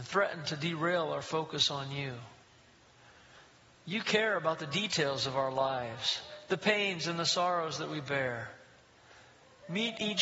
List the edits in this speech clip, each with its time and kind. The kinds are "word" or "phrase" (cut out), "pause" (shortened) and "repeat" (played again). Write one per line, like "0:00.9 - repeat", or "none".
none